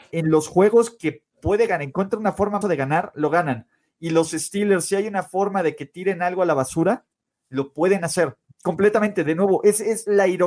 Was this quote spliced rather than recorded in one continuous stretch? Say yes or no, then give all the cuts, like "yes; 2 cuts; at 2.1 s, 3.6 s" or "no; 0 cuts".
yes; 1 cut; at 2.6 s